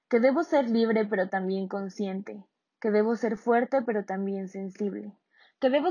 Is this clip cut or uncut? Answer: uncut